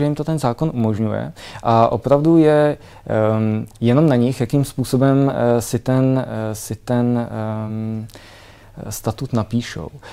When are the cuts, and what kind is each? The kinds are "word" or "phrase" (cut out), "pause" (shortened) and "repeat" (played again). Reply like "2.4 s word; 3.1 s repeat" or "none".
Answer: none